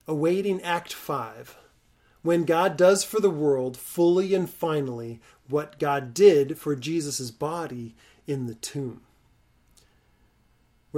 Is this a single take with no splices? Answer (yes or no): yes